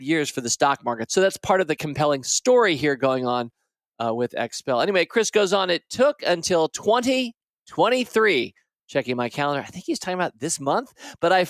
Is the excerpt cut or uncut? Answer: uncut